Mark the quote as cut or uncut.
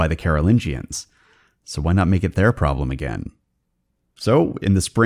uncut